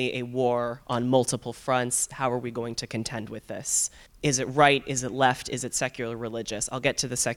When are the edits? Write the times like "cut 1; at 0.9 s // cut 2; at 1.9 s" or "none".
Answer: cut 1; at 4.1 s